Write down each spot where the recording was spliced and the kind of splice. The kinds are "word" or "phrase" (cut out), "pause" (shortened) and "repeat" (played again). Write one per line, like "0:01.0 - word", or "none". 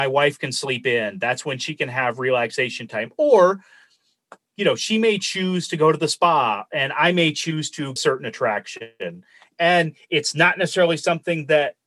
0:08.0 - phrase